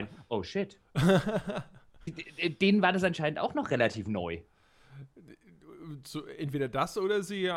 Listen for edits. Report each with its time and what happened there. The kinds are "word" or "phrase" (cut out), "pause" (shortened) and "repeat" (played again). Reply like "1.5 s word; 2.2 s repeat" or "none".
2.1 s word